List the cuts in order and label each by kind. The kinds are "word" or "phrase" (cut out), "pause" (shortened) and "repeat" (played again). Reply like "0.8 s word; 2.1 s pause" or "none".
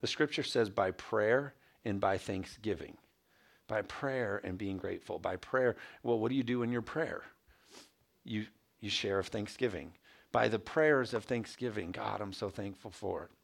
none